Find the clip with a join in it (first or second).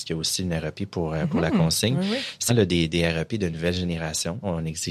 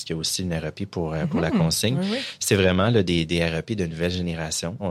first